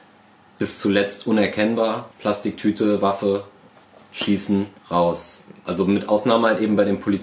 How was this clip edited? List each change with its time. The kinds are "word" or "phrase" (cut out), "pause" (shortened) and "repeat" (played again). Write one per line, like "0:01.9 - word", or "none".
0:02.1 - pause
0:04.8 - pause